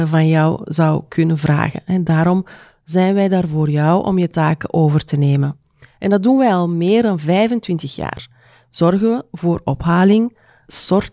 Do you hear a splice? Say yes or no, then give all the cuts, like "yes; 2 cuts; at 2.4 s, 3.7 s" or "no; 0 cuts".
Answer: no; 0 cuts